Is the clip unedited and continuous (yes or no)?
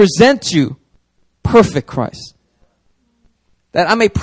no